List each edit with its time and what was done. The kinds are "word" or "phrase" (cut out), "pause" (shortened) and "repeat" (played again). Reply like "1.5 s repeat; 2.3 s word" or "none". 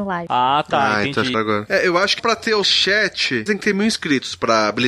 1.3 s word; 2.2 s word; 2.6 s word; 3.5 s word